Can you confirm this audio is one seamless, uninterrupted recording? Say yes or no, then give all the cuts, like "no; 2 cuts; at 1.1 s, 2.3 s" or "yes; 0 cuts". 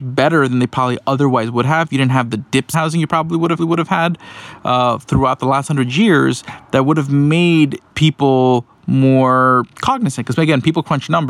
no; 4 cuts; at 2.7 s, 3.6 s, 7.9 s, 9.7 s